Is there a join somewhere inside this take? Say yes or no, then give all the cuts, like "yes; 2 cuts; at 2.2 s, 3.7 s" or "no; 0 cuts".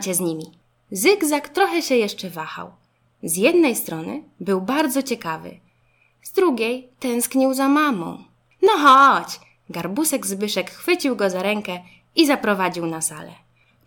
no; 0 cuts